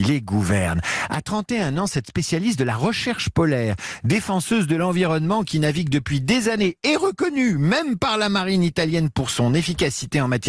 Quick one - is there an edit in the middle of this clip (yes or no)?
no